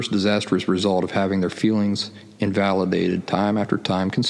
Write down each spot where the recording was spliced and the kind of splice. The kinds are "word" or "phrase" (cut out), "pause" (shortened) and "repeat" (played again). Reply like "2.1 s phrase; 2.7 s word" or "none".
none